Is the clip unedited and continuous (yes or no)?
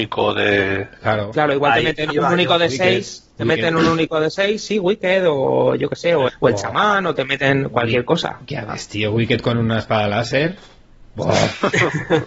no